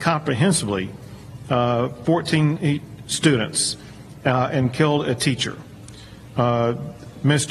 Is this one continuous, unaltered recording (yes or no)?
yes